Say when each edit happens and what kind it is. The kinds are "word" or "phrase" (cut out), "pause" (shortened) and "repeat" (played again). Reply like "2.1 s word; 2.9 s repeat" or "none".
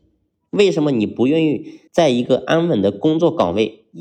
1.9 s pause